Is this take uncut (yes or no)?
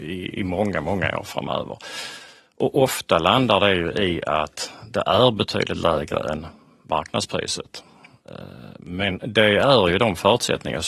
yes